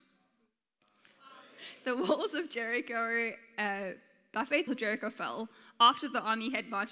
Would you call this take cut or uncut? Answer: cut